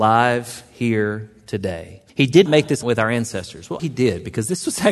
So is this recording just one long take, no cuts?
no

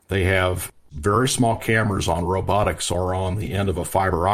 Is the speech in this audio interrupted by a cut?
no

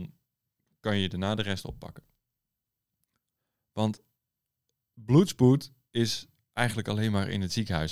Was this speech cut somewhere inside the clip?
no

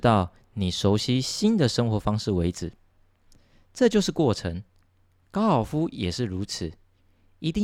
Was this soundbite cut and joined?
no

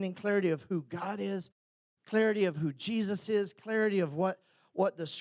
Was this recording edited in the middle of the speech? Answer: no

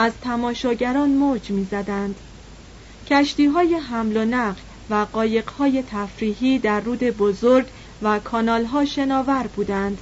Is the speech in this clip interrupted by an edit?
no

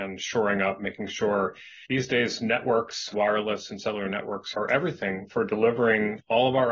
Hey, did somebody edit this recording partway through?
yes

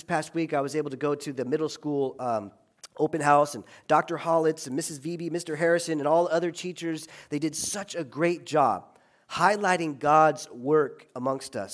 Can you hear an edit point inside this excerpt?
no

